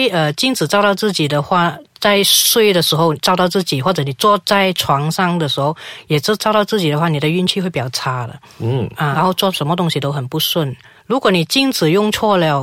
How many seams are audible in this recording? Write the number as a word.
one